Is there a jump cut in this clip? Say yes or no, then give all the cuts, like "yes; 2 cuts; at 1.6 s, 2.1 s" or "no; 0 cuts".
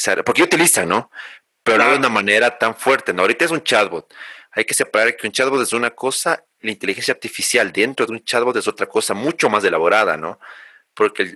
no; 0 cuts